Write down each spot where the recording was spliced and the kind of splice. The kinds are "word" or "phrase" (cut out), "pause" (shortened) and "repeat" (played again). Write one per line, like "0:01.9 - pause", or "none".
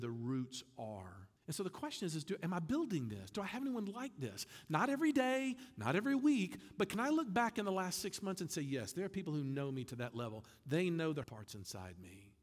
0:01.4 - pause
0:11.2 - word